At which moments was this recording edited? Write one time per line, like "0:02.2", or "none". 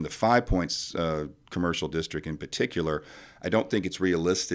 none